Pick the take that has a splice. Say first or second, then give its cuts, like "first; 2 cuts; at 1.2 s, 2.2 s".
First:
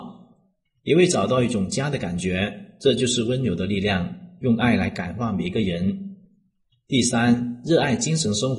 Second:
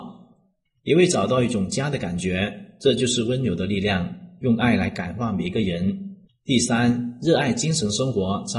second; 1 cut; at 6.3 s